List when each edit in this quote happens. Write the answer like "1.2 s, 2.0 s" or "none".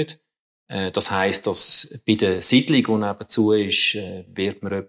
none